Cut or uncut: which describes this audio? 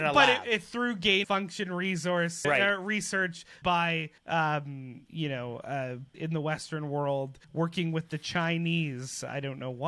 cut